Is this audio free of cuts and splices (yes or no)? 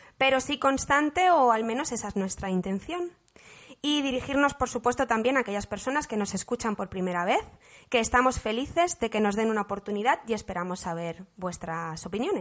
yes